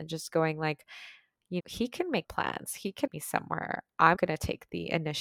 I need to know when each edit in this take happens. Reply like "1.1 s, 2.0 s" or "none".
1.6 s, 2.2 s, 3.1 s, 4.2 s